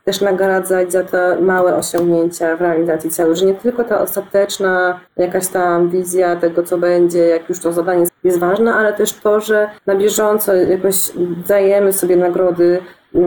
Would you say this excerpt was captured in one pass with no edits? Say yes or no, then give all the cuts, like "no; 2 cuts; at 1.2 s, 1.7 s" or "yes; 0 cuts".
no; 3 cuts; at 5.1 s, 8.1 s, 9.8 s